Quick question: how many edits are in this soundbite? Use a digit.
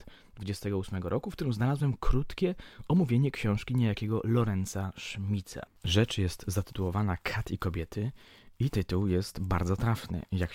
1